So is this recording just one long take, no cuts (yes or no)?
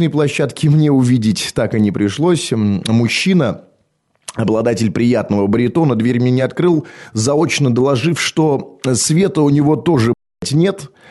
yes